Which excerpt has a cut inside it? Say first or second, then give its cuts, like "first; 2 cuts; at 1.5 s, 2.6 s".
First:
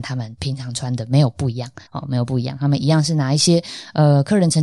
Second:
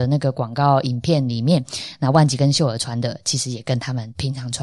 first; 1 cut; at 1.9 s